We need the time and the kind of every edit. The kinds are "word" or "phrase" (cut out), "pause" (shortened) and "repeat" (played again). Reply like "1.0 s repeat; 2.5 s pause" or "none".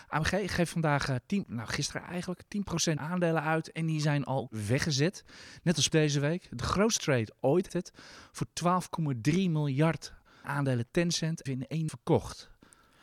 1.4 s word; 3.0 s word; 4.5 s word; 5.9 s word; 7.0 s word; 7.7 s word; 10.4 s word; 11.5 s word; 11.9 s word